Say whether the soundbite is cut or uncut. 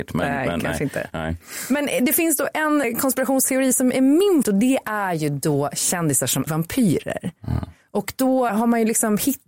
cut